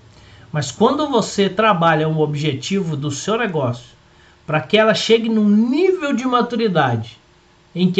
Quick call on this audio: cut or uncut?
uncut